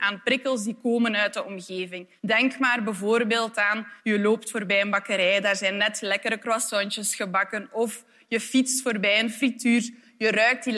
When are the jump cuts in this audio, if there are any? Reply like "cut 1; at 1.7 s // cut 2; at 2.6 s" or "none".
cut 1; at 2.2 s // cut 2; at 4.0 s